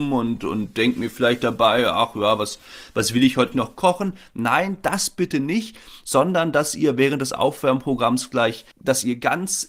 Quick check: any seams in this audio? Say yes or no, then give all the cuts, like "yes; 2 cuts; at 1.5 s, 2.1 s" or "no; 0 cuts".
yes; 2 cuts; at 3.5 s, 8.7 s